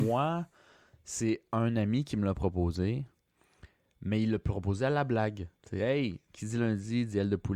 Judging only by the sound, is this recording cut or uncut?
cut